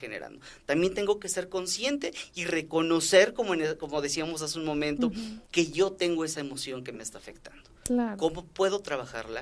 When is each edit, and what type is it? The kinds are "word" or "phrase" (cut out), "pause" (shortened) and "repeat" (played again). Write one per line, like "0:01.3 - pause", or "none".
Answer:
0:05.5 - pause

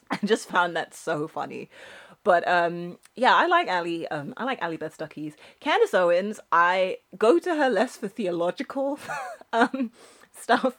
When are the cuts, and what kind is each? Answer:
none

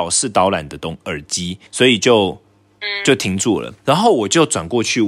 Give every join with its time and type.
0:01.7 - pause
0:03.8 - pause

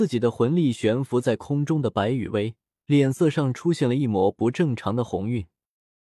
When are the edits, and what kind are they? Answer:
0:02.7 - pause

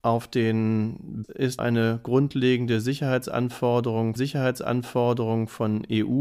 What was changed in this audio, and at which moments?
0:01.2 - phrase
0:01.6 - phrase
0:04.2 - repeat

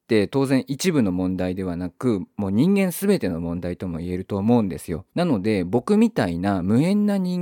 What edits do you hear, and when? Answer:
0:05.1 - pause

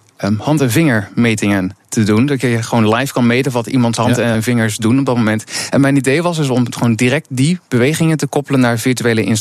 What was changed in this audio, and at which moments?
0:04.3 - word

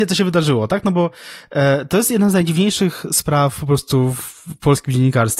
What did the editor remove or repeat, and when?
none

